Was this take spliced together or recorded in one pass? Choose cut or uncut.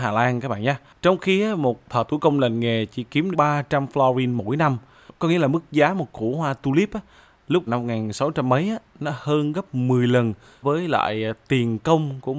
cut